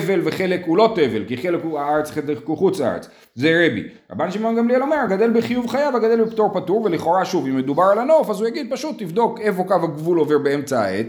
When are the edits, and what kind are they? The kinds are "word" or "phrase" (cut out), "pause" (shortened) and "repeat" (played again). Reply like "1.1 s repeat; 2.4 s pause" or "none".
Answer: none